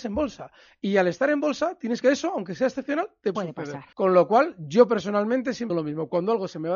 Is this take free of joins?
no; 4 cuts; at 2.0 s, 3.3 s, 3.9 s, 5.7 s

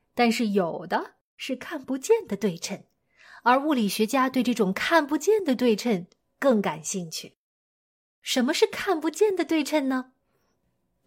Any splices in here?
no; 0 cuts

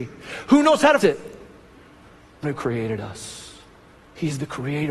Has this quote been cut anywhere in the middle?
yes; 3 cuts; at 1.0 s, 2.4 s, 3.9 s

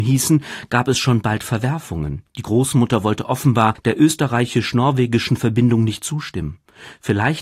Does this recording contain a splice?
no; 0 cuts

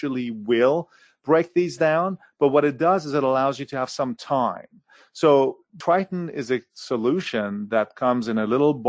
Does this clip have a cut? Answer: no; 0 cuts

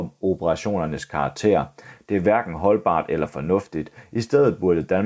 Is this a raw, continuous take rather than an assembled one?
yes; 0 cuts

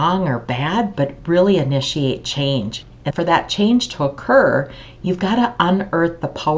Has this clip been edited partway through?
yes; 1 cut; at 3.1 s

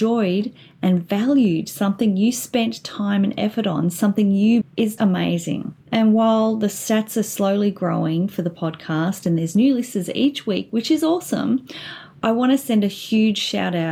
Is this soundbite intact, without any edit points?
no; 3 cuts; at 4.6 s, 5.0 s, 5.8 s

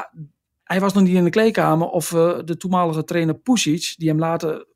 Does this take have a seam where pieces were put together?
no; 0 cuts

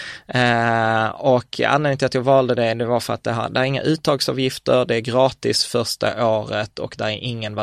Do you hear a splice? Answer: no; 0 cuts

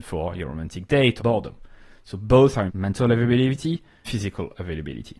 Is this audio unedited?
no; 3 cuts; at 1.2 s, 2.7 s, 4.0 s

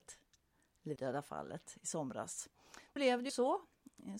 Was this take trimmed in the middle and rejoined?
yes; 3 cuts; at 1.0 s, 3.0 s, 3.3 s

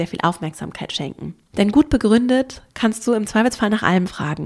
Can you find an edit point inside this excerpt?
yes; 1 cut; at 1.4 s

